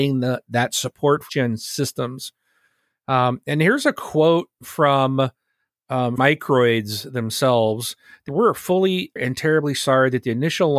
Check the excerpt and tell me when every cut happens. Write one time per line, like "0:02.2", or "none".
0:01.3
0:06.2
0:08.3
0:09.2